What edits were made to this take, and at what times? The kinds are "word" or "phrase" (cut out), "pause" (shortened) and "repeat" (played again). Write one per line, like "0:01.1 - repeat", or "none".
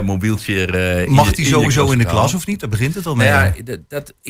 none